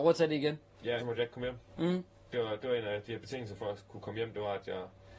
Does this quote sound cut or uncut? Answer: cut